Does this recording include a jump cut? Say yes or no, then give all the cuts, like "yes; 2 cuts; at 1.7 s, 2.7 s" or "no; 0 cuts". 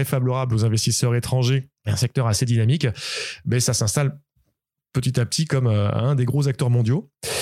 no; 0 cuts